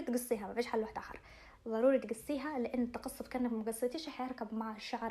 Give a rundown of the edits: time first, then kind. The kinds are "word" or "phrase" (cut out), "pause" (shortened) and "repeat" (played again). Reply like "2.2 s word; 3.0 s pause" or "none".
none